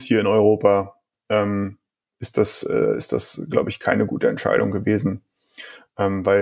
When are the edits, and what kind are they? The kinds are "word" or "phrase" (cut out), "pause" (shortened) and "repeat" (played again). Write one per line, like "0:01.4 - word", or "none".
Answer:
none